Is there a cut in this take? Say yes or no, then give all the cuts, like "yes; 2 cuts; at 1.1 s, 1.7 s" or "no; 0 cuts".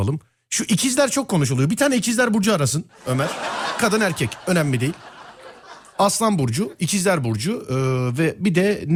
no; 0 cuts